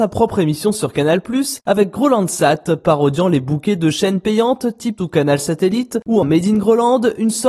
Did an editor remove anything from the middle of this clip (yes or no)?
yes